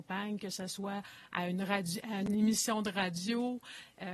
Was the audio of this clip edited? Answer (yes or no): no